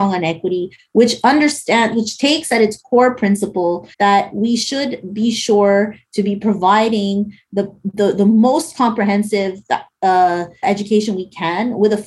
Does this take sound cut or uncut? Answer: cut